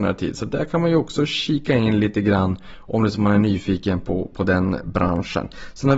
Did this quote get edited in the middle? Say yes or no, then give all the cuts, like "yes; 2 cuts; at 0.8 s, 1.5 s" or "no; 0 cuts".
no; 0 cuts